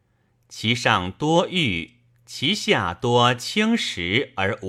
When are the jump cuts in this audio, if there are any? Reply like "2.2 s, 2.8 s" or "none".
none